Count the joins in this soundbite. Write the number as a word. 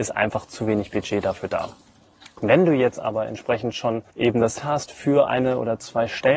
two